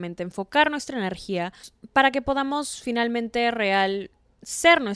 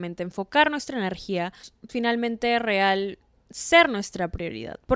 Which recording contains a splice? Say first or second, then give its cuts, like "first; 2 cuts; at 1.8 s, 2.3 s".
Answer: second; 1 cut; at 1.9 s